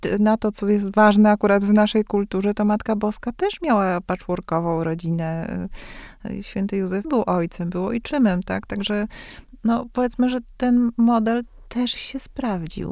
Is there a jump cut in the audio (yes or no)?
yes